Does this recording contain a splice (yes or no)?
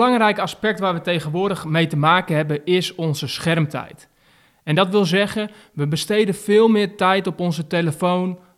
no